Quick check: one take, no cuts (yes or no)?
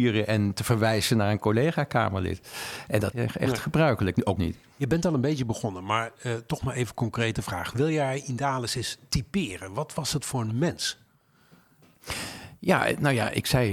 no